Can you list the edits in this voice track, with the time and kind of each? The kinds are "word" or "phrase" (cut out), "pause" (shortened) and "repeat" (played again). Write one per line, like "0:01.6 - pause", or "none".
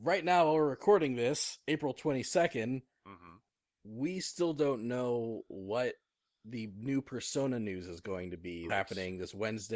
0:08.7 - word

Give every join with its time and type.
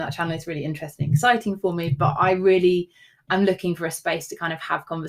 none

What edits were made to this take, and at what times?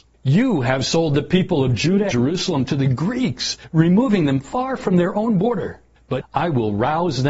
0:02.1 - word
0:06.2 - word

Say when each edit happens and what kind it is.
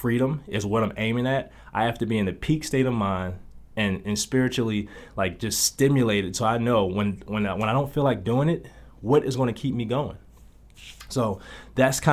none

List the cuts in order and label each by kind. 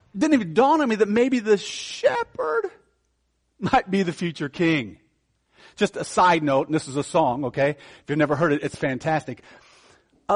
none

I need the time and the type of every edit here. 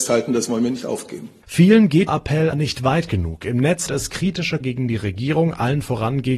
0:02.1 - word
0:02.5 - word
0:03.9 - word
0:04.6 - word

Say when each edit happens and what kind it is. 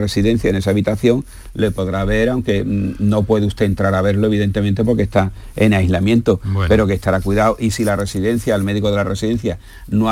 none

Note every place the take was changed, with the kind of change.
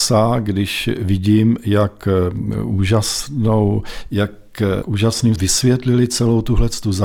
0:04.1 - word
0:04.8 - word
0:05.4 - word

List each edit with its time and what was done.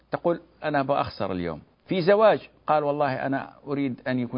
0:01.7 - pause

